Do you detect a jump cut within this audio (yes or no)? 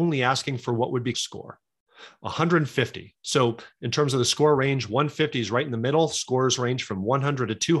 yes